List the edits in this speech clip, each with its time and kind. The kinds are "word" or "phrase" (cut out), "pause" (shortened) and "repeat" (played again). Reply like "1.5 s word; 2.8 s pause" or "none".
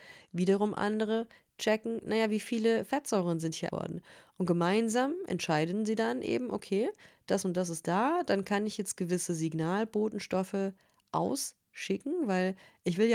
3.7 s phrase